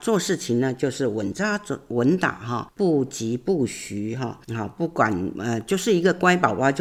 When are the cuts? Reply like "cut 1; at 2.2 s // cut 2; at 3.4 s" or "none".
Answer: cut 1; at 2.7 s // cut 2; at 4.4 s